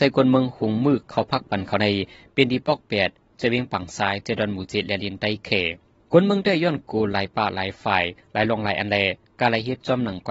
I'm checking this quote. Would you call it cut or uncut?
uncut